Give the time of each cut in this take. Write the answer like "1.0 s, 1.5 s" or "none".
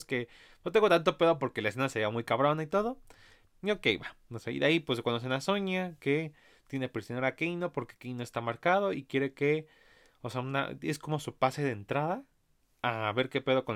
none